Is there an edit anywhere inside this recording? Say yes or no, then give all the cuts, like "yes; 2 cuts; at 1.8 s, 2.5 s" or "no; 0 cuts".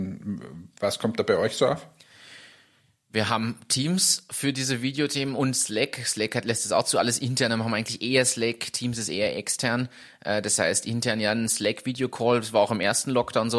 no; 0 cuts